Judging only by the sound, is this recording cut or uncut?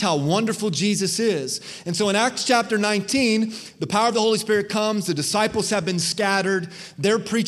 uncut